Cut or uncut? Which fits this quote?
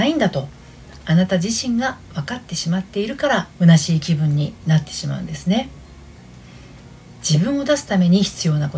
cut